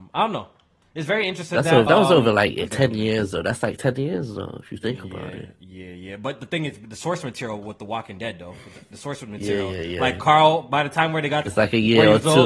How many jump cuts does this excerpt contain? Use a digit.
3